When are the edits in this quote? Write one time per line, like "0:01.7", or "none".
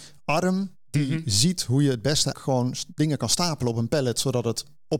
0:02.3